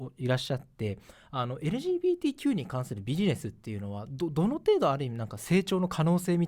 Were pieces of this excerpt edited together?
no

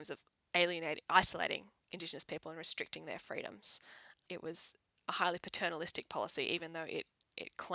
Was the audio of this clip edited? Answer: no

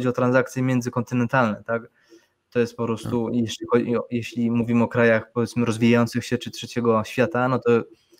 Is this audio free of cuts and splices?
yes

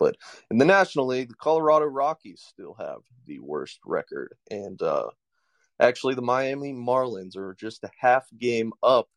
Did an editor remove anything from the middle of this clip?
no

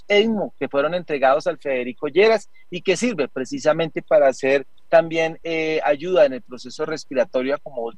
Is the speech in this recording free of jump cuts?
yes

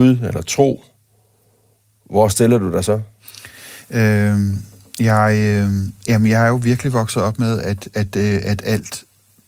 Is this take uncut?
yes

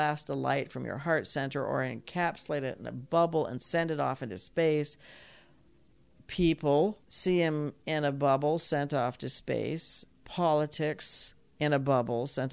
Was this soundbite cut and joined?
yes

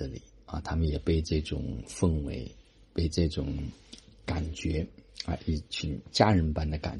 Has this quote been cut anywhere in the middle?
no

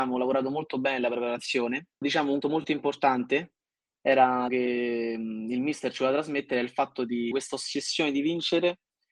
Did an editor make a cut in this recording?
yes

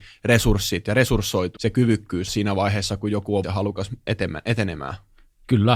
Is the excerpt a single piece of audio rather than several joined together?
no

